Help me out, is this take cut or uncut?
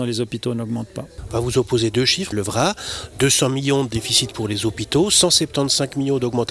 cut